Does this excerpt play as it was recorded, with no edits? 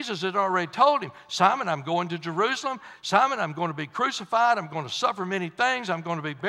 yes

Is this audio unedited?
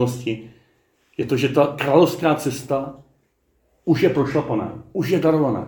yes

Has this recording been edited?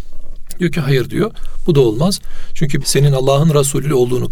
yes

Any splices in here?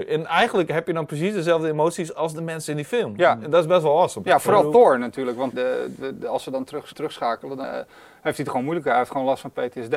yes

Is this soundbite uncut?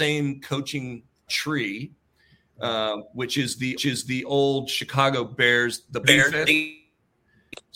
no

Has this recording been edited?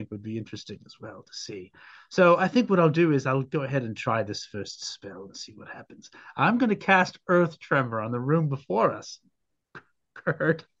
no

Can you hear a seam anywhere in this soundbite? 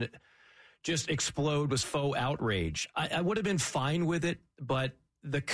yes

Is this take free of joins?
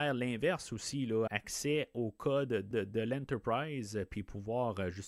no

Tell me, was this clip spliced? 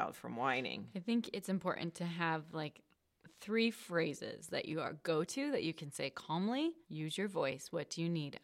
yes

